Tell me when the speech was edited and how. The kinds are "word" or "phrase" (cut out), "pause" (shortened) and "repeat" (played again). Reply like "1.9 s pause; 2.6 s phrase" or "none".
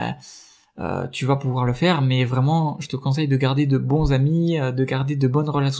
none